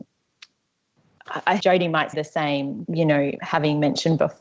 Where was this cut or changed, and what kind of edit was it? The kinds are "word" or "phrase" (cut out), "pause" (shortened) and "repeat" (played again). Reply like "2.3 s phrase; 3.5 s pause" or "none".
1.6 s word; 2.1 s word; 2.8 s word